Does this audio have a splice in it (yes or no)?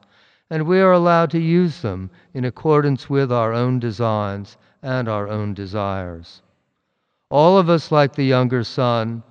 no